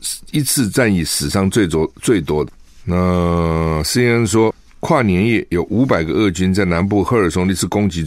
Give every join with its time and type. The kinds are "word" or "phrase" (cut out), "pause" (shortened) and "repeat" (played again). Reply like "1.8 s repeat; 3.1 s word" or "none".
none